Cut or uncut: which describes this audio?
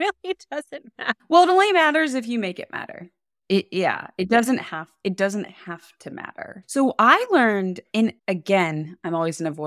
cut